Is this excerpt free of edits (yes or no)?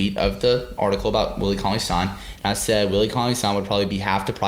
yes